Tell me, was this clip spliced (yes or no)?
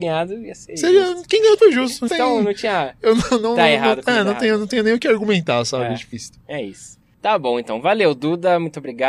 yes